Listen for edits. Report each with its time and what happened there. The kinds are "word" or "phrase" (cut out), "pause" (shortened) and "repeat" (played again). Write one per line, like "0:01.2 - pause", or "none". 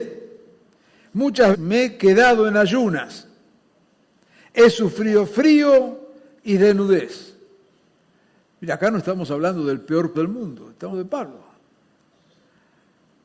0:01.5 - word
0:10.1 - word
0:10.9 - word